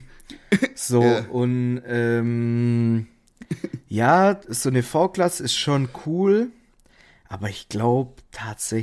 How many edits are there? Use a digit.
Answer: 0